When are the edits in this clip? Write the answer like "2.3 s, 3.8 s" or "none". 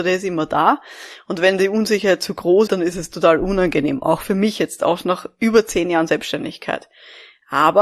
2.7 s